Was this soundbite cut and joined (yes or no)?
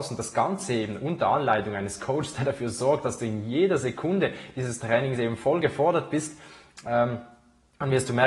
no